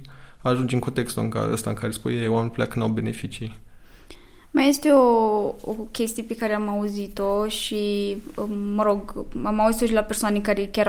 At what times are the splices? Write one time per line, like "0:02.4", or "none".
none